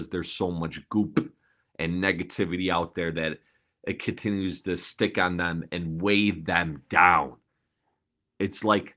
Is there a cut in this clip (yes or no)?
no